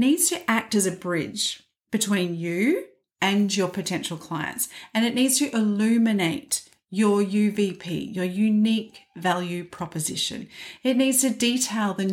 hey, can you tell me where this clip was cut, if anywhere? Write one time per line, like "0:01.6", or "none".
none